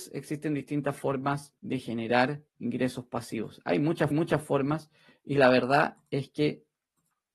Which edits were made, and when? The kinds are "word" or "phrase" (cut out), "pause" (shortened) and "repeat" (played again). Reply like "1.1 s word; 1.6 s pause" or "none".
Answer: 1.6 s pause; 2.5 s pause; 4.1 s repeat